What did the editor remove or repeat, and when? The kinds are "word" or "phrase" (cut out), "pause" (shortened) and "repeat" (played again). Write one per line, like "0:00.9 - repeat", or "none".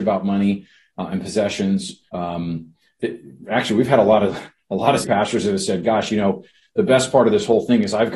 0:02.1 - pause
0:05.0 - word